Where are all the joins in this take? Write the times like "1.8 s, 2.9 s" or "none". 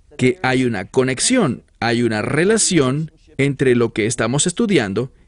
none